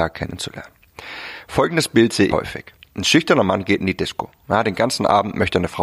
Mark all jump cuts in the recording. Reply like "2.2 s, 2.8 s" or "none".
2.3 s

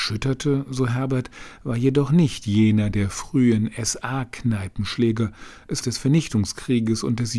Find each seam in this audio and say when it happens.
5.8 s

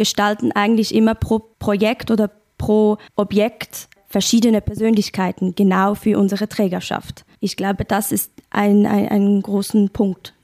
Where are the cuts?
1.5 s, 3.1 s, 7.3 s

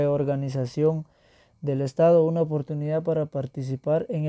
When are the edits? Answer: none

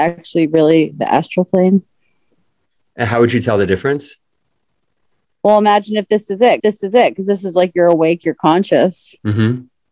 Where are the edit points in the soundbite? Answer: 6.6 s

